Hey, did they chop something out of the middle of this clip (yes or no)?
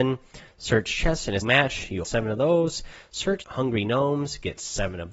yes